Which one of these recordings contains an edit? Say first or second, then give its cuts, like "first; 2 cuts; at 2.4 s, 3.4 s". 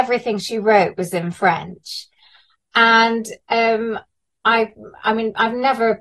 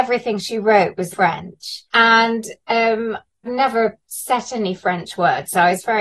second; 3 cuts; at 1.1 s, 1.9 s, 3.5 s